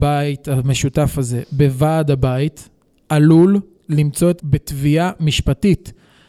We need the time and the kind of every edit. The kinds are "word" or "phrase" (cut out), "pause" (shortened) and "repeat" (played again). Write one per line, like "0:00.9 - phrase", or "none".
0:04.4 - word